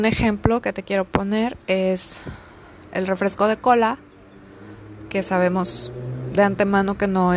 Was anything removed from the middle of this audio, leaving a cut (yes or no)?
no